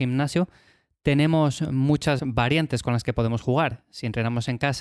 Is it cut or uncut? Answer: cut